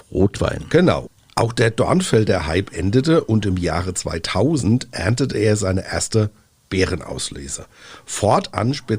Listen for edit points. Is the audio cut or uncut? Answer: uncut